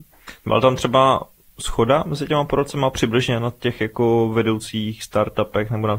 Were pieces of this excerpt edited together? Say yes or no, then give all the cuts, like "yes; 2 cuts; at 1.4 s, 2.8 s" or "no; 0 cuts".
no; 0 cuts